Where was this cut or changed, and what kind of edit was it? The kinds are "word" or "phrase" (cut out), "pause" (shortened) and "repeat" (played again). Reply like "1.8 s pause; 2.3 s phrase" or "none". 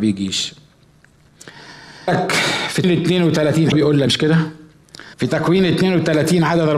2.1 s word; 2.8 s word; 3.7 s word; 4.1 s word; 5.1 s pause